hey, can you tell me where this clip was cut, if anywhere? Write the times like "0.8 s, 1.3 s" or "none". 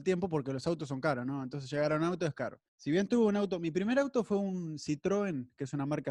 2.7 s